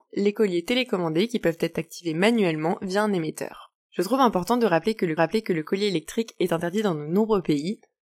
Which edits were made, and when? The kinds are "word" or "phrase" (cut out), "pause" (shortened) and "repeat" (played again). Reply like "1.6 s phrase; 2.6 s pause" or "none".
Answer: 5.2 s repeat